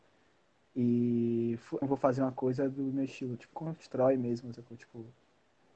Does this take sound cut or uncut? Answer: cut